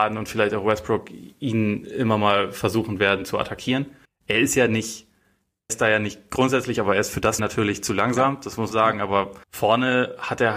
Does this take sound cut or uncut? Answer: cut